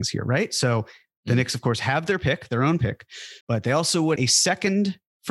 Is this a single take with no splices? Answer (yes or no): no